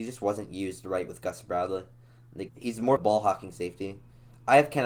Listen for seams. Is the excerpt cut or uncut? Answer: cut